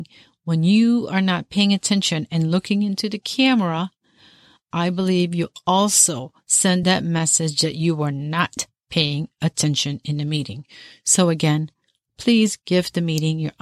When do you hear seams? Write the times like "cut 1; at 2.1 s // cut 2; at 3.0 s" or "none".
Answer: none

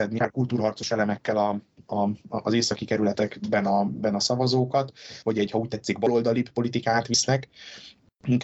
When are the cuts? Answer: none

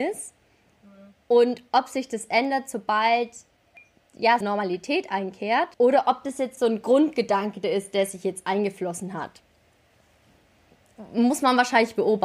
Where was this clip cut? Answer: cut 1; at 4.4 s // cut 2; at 5.7 s // cut 3; at 6.6 s

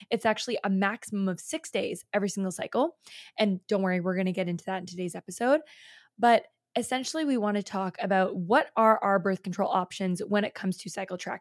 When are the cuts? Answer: none

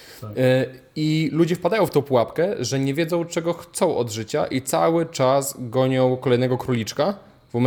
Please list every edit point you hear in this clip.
none

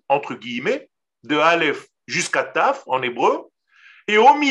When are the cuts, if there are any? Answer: none

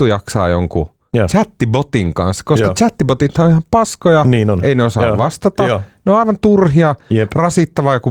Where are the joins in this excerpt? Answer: none

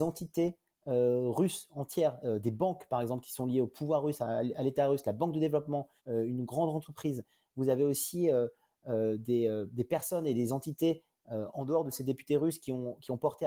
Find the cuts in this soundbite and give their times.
cut 1; at 6.0 s

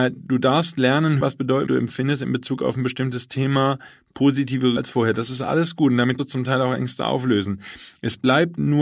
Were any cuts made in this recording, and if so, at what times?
cut 1; at 1.2 s // cut 2; at 1.7 s // cut 3; at 4.8 s // cut 4; at 6.2 s

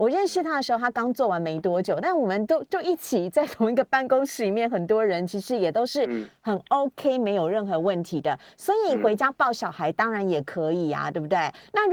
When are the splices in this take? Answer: none

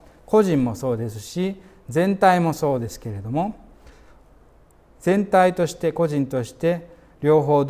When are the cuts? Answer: none

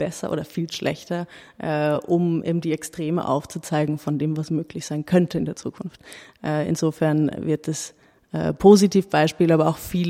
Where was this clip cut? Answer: none

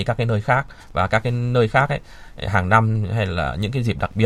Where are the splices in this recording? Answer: none

